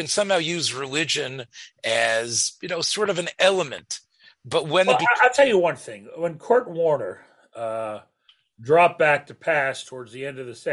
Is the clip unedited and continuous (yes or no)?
yes